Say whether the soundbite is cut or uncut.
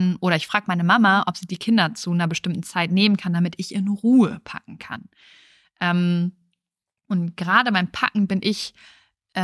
uncut